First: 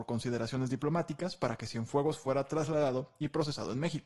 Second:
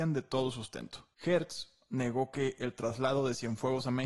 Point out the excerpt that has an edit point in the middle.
second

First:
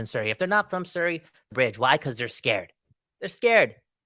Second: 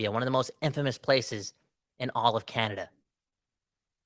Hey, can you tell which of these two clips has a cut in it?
first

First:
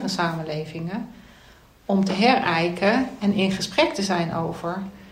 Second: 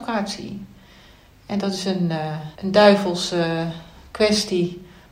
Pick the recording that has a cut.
second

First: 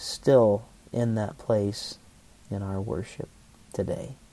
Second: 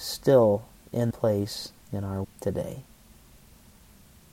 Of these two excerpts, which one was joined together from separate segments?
second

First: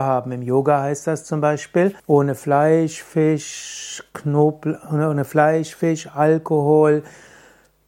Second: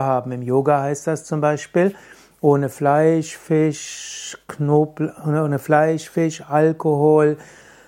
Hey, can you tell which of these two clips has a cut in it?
first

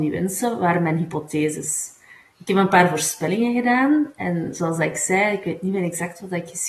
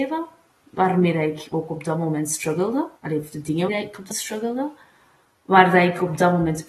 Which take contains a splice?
second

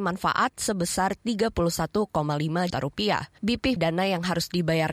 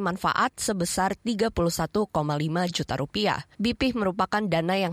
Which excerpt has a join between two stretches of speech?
first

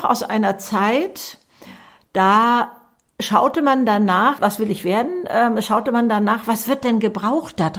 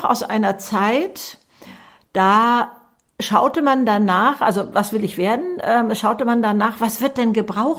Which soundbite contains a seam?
first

